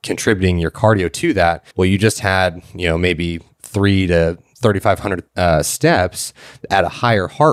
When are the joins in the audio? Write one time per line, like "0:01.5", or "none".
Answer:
0:01.7
0:05.3

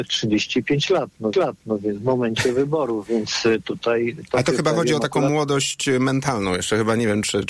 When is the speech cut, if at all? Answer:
0:01.3

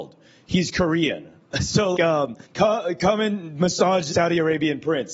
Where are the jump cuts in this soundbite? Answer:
0:01.9
0:02.4
0:04.1

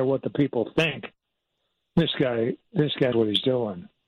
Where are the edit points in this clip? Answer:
0:03.1

